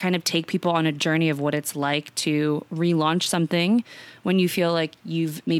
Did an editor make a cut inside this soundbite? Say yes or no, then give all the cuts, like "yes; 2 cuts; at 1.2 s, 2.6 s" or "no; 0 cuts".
no; 0 cuts